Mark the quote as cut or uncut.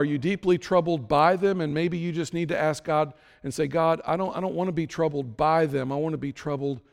uncut